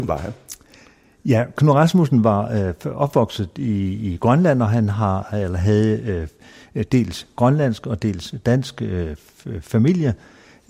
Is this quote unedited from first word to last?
yes; 0 cuts

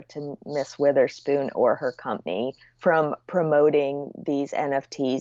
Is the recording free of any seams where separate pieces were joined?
yes; 0 cuts

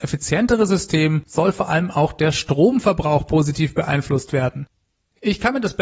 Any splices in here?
no; 0 cuts

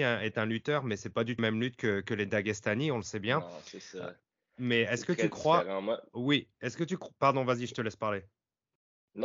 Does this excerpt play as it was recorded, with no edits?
no; 2 cuts; at 1.4 s, 2.0 s

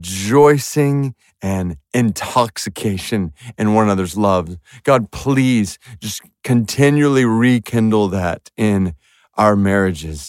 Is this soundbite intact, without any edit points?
yes; 0 cuts

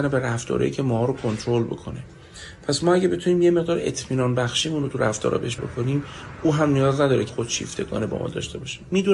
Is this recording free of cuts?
no; 2 cuts; at 5.6 s, 7.3 s

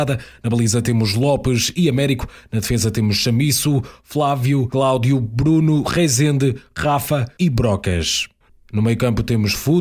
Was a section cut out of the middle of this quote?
no; 0 cuts

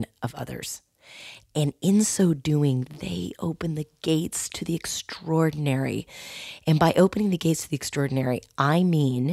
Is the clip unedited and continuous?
yes; 0 cuts

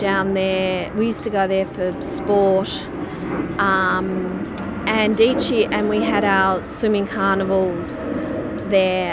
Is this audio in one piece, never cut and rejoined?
yes; 0 cuts

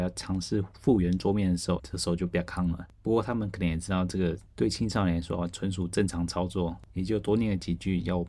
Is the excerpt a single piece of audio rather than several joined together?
no; 1 cut; at 1.8 s

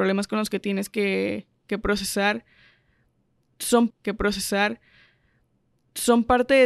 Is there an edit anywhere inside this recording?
yes; 1 cut; at 3.9 s

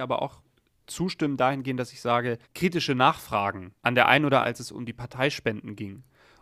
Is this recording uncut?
no; 3 cuts; at 2.4 s, 3.8 s, 4.4 s

